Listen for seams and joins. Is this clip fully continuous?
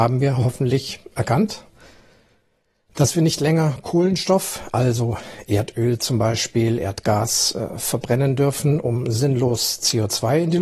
yes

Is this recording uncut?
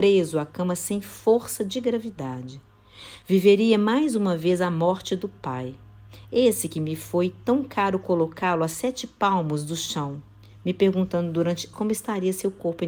no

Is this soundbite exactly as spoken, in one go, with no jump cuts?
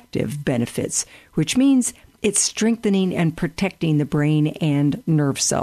yes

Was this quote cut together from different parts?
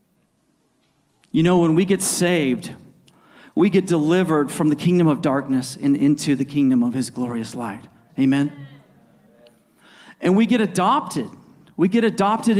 no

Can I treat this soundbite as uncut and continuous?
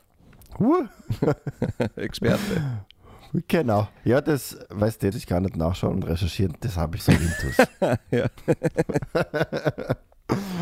no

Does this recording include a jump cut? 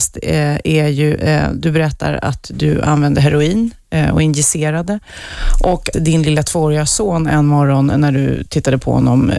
yes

